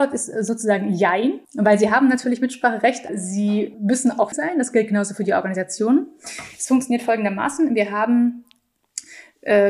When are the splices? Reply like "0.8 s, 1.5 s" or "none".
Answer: 1.4 s, 3.1 s, 3.7 s, 4.3 s